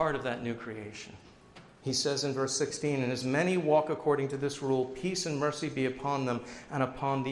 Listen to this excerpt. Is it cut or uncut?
uncut